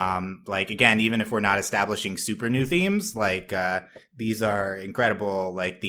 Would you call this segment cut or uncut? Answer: uncut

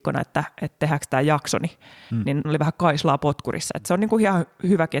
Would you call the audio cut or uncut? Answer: cut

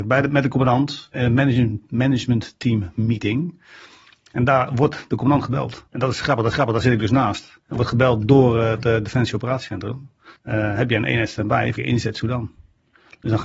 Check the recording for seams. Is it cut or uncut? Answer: cut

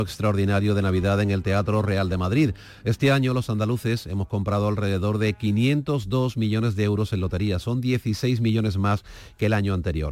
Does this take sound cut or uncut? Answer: uncut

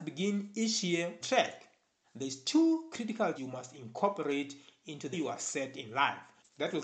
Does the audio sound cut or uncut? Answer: cut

